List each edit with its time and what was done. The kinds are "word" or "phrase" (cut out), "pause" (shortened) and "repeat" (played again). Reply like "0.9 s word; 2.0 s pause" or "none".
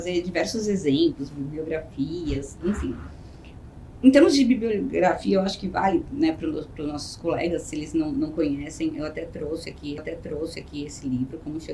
10.0 s repeat